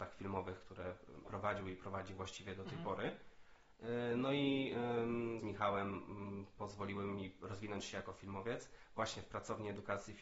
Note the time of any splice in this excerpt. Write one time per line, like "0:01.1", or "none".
0:01.2
0:05.4